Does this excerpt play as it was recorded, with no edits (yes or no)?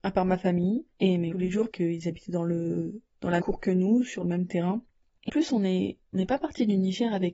no